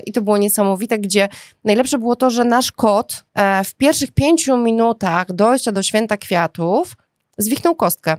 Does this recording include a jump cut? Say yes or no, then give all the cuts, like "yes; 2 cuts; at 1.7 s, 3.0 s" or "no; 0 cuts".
yes; 1 cut; at 3.3 s